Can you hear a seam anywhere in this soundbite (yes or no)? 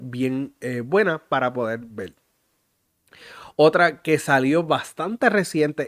no